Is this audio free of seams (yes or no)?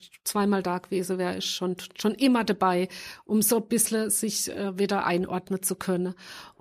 yes